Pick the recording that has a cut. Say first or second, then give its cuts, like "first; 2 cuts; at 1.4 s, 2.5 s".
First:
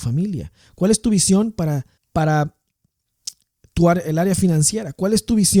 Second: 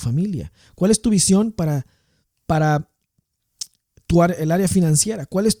first; 1 cut; at 2.0 s